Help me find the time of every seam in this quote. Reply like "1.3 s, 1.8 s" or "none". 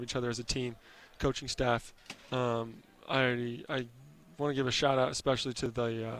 none